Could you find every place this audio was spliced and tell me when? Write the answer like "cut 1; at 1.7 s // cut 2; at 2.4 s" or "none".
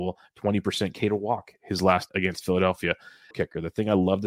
cut 1; at 2.1 s // cut 2; at 3.3 s